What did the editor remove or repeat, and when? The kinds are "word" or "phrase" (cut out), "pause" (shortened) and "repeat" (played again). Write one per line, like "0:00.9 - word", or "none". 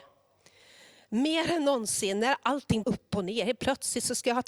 0:02.8 - phrase